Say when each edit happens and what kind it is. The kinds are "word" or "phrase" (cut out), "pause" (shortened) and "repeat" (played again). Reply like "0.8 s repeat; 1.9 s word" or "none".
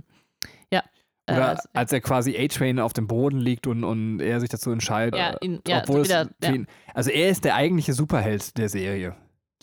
5.1 s word